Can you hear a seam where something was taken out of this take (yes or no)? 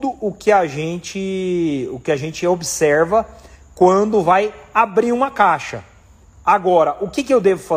no